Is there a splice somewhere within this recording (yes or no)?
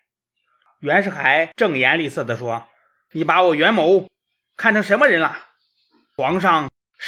no